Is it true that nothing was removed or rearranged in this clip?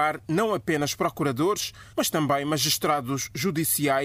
no; 1 cut; at 1.9 s

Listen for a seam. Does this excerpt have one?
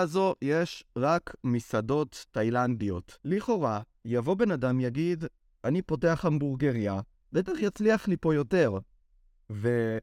yes; 1 cut; at 3.2 s

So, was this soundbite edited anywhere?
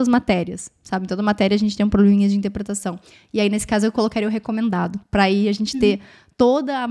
yes; 1 cut; at 5.0 s

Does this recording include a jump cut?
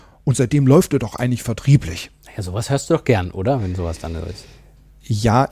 no; 0 cuts

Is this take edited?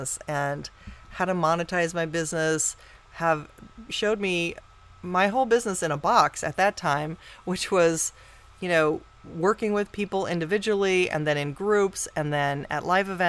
yes; 1 cut; at 3.9 s

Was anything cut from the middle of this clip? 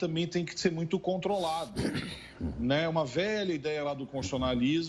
no; 0 cuts

